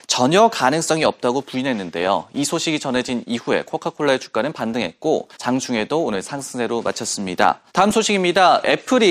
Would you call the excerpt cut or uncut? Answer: cut